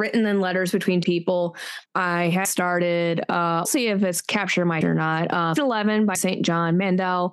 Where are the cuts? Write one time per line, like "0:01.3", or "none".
0:01.0
0:01.9
0:02.4
0:03.6
0:04.8
0:05.6
0:06.1